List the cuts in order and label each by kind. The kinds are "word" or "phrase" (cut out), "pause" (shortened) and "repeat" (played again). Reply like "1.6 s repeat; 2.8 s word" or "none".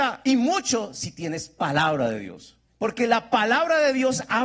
2.7 s pause